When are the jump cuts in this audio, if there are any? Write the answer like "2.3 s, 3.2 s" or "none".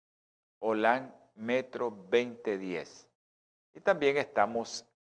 none